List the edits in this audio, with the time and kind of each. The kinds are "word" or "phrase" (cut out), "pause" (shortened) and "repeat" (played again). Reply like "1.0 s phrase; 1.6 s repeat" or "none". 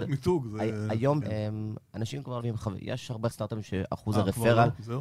1.2 s word; 2.4 s word; 3.3 s word

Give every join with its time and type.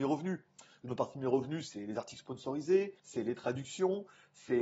3.0 s pause

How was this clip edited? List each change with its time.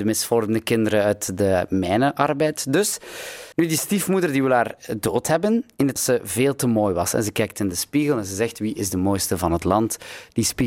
3.5 s pause; 6.0 s phrase

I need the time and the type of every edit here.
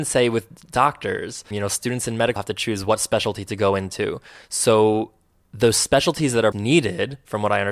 1.5 s word; 2.4 s word; 6.5 s word

